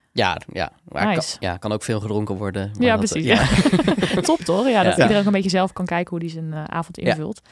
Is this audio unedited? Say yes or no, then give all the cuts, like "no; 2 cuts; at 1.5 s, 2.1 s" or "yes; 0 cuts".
no; 1 cut; at 4.2 s